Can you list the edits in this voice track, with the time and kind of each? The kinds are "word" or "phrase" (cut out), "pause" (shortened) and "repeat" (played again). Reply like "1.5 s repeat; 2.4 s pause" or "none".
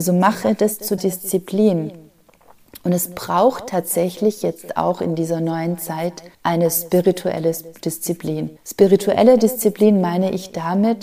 1.0 s word; 6.3 s pause; 8.6 s pause